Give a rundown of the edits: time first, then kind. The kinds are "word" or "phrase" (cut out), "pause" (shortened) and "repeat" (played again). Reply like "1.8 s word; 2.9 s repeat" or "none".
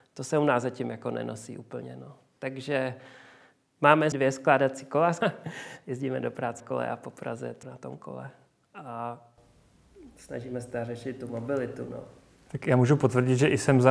4.1 s word; 5.2 s word; 6.6 s word; 7.6 s word